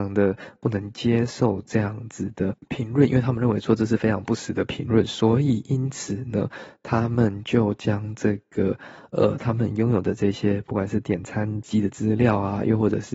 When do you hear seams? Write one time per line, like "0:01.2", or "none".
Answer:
0:11.6